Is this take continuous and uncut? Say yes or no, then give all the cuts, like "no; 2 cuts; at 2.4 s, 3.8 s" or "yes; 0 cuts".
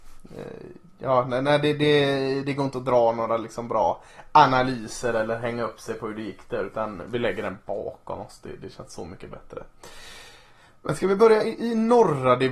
yes; 0 cuts